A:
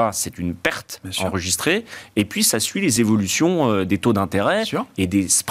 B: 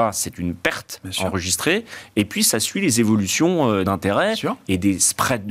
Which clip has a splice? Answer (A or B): B